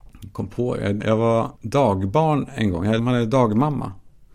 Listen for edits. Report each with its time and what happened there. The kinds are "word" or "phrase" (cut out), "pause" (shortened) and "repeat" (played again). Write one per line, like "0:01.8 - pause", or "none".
0:01.0 - word
0:01.5 - pause
0:03.0 - word